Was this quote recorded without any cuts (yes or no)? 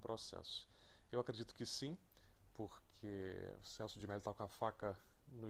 yes